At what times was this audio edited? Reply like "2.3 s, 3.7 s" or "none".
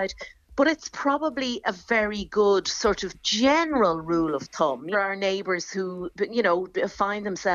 4.9 s